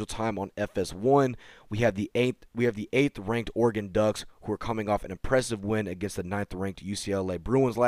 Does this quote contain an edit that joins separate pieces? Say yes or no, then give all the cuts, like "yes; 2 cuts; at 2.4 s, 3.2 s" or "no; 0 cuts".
no; 0 cuts